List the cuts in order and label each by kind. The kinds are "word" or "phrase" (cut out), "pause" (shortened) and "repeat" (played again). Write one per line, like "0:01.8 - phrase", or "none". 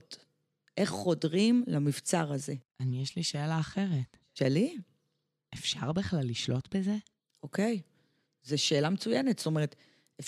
none